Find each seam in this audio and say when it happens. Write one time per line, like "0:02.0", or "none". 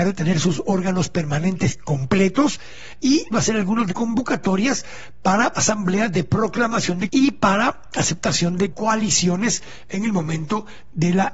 0:03.3
0:03.9
0:05.5
0:07.1
0:08.7